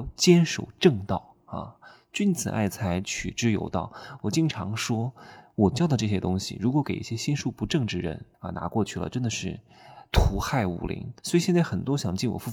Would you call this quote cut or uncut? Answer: cut